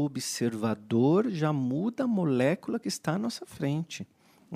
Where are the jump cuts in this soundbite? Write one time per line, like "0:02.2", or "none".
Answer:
none

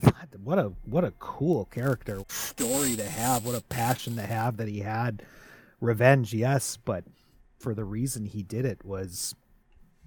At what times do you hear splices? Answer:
0:02.2

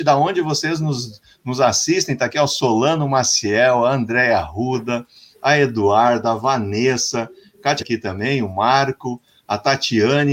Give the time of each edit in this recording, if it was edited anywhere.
0:07.8

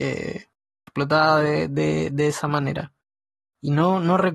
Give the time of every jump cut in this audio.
none

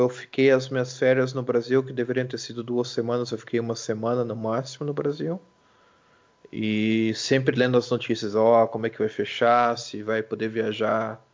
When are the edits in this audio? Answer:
none

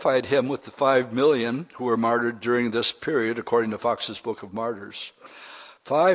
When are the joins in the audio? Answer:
none

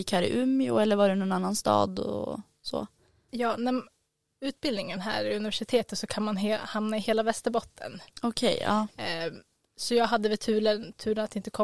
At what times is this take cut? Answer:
none

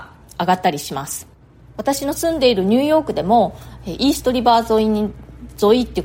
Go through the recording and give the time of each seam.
none

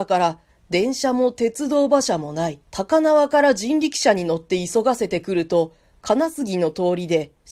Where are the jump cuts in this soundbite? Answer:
0:02.6

